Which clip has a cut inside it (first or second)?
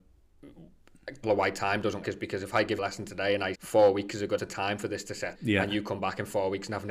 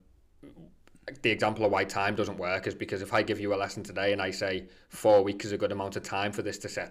first